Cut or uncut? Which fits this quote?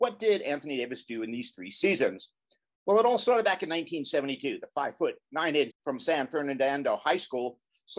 cut